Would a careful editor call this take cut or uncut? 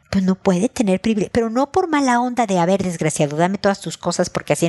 uncut